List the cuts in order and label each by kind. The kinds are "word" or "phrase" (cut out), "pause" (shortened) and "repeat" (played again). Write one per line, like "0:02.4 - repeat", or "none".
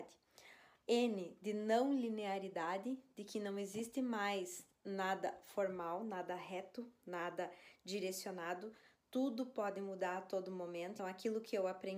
0:11.0 - word